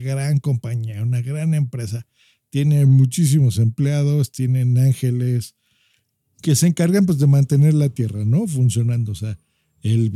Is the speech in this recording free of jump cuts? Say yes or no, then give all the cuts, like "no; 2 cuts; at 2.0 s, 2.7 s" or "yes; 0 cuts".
yes; 0 cuts